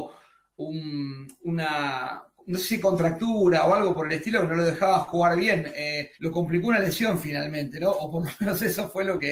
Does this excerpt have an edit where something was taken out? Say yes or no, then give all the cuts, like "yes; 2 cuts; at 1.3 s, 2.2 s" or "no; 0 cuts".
yes; 1 cut; at 6.1 s